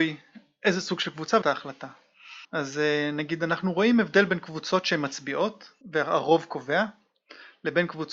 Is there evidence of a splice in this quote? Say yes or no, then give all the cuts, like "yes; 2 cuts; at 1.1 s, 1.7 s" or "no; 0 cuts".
yes; 3 cuts; at 1.4 s, 2.4 s, 5.8 s